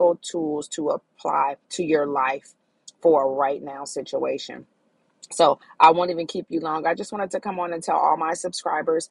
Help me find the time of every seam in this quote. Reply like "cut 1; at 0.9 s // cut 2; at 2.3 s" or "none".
cut 1; at 1.6 s